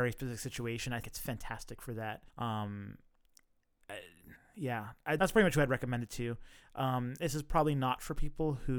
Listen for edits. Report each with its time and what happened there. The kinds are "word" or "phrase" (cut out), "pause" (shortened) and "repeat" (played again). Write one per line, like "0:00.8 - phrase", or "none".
0:01.0 - word
0:02.3 - pause
0:04.3 - pause
0:05.2 - word